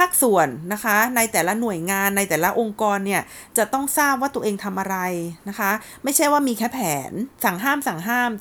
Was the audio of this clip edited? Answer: yes; 1 cut; at 7.3 s

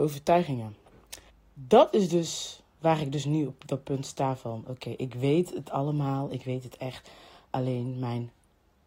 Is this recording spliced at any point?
yes; 1 cut; at 1.3 s

